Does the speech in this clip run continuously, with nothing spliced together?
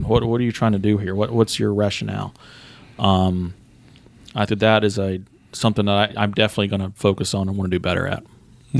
no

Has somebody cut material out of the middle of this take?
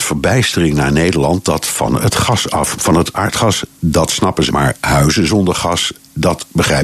yes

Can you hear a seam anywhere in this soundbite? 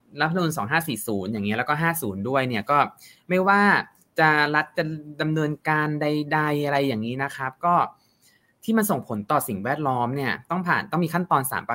no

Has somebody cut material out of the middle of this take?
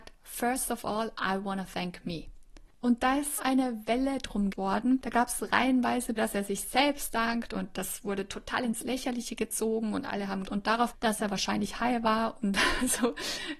yes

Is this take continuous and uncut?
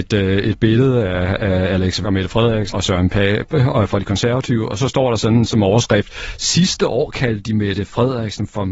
no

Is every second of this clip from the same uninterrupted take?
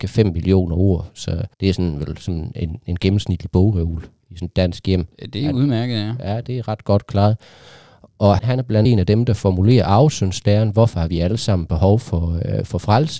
no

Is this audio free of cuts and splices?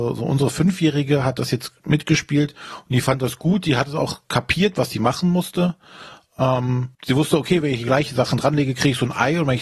no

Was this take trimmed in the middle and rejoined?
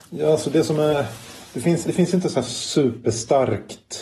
yes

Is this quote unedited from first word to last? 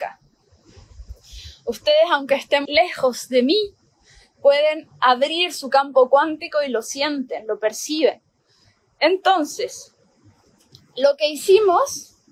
no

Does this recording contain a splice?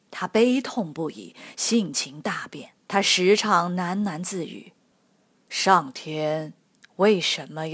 yes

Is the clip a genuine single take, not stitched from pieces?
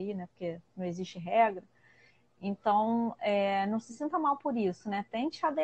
yes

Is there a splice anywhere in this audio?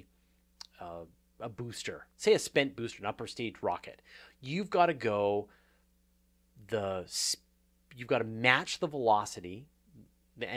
no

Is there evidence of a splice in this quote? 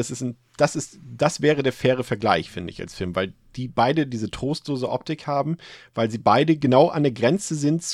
no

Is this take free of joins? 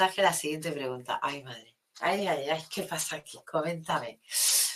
yes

